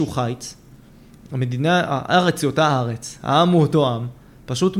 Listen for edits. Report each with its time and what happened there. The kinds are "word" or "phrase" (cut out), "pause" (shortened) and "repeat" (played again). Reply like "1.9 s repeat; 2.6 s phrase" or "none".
none